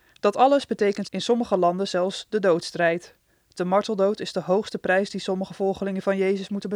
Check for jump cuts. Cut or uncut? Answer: cut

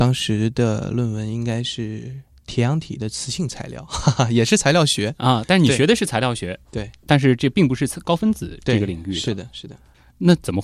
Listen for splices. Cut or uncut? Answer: cut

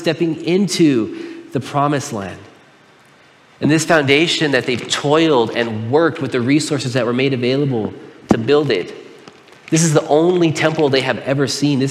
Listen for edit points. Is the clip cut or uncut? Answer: uncut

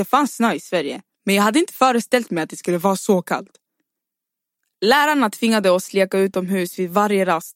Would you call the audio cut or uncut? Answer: uncut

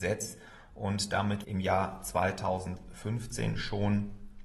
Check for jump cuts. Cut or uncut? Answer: cut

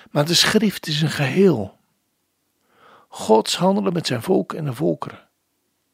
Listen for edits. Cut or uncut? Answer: uncut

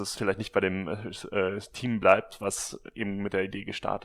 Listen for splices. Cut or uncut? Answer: uncut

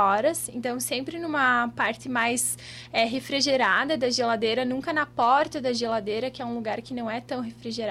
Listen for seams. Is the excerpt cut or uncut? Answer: uncut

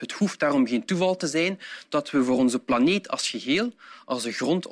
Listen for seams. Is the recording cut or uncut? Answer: uncut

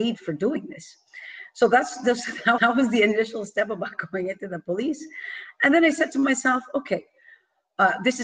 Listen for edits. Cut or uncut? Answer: cut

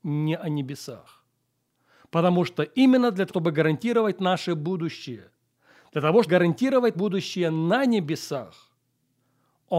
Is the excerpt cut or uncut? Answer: cut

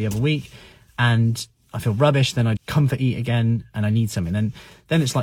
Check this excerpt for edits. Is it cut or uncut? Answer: cut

